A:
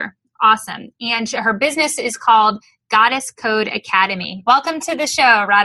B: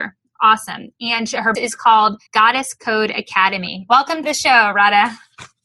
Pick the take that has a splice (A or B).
B